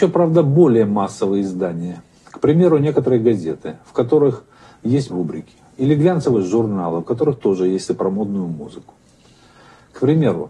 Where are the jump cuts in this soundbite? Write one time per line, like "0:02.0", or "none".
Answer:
0:05.1
0:07.9